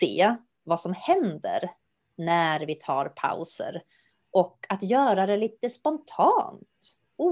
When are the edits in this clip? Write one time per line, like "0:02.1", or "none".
none